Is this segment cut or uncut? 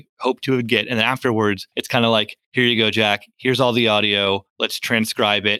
cut